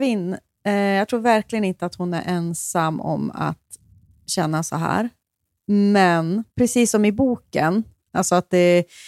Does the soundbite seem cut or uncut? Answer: cut